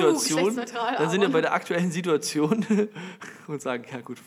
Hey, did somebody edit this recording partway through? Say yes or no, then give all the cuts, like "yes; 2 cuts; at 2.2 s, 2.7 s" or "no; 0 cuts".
no; 0 cuts